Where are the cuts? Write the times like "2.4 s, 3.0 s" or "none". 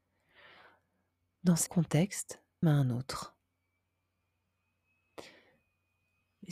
1.7 s, 2.6 s